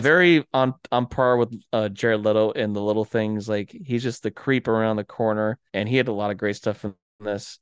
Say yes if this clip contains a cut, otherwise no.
yes